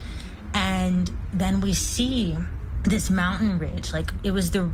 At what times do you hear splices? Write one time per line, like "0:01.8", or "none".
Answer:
none